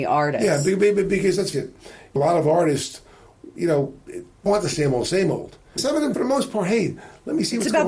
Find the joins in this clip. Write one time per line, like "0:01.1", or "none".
0:01.5
0:02.2
0:03.5
0:04.5
0:05.8
0:06.1